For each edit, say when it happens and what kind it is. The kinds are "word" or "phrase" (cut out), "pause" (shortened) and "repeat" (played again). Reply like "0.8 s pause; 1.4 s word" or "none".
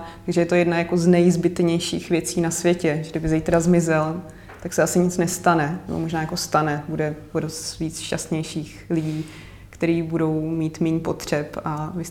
none